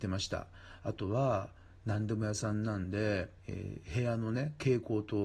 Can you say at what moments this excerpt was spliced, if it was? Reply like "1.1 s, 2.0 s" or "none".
3.4 s